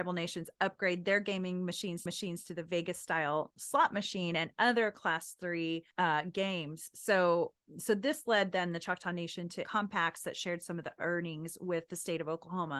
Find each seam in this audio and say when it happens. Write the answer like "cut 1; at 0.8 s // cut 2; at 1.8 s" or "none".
cut 1; at 2.1 s // cut 2; at 5.9 s // cut 3; at 9.6 s